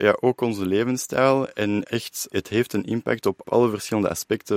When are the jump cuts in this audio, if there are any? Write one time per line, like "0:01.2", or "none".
none